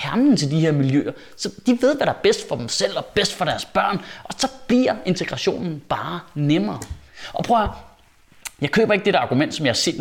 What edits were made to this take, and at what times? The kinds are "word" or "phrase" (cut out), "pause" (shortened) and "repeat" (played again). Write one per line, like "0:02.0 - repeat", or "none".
none